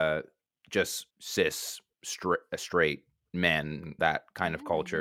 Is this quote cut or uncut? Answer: cut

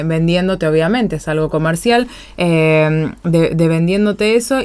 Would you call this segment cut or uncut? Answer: uncut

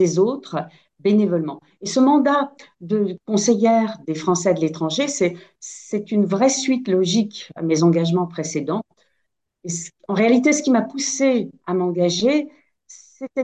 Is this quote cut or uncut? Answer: uncut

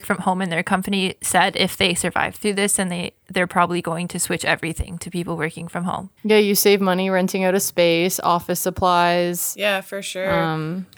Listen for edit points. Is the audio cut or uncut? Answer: cut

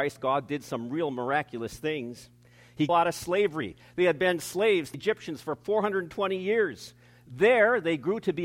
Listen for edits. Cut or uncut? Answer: cut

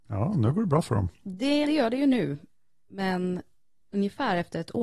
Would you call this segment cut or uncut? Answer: cut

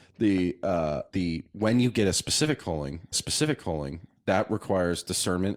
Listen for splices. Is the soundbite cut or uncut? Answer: cut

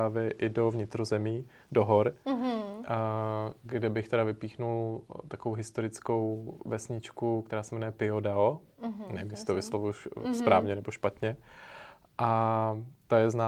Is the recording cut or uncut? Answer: uncut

